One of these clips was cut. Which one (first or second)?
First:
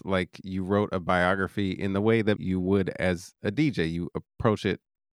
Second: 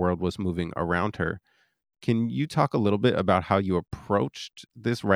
first